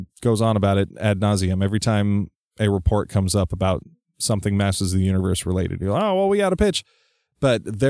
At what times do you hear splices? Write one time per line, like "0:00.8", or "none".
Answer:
none